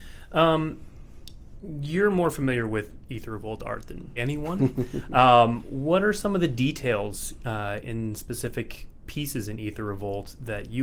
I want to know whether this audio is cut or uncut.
cut